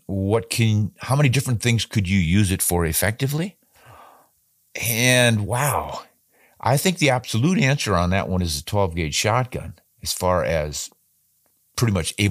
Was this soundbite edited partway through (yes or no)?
no